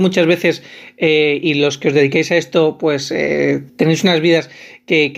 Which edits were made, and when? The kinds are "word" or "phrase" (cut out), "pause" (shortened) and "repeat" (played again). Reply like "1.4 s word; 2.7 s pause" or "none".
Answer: 3.7 s pause